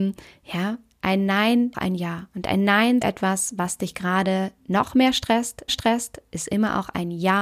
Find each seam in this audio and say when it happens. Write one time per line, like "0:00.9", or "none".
0:01.7
0:03.0
0:05.7